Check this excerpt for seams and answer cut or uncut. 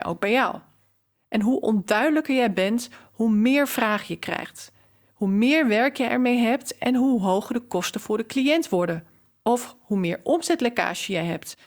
uncut